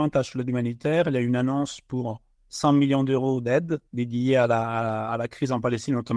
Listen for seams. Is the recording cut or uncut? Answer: cut